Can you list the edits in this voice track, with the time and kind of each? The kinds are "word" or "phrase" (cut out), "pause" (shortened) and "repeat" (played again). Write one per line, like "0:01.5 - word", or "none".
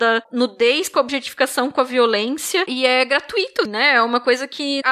0:03.7 - word